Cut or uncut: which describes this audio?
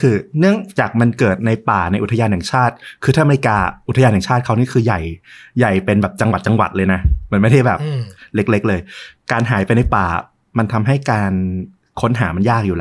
uncut